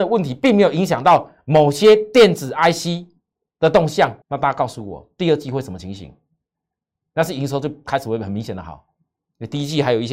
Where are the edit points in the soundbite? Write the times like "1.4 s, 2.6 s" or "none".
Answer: 4.2 s